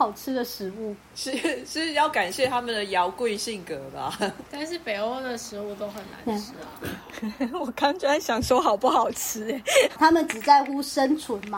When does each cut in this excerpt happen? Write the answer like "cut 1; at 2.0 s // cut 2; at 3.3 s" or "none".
cut 1; at 4.5 s